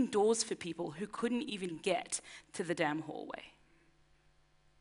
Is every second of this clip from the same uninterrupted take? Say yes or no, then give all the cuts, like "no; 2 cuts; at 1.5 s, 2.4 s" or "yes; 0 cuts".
yes; 0 cuts